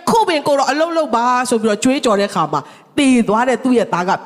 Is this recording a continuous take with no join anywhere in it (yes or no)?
yes